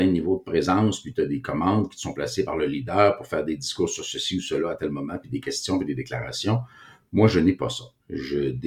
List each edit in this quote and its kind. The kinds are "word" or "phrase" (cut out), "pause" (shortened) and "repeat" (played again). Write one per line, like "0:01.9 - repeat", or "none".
none